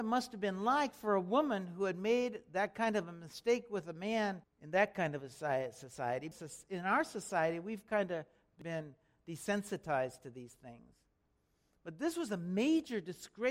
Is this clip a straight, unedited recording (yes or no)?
yes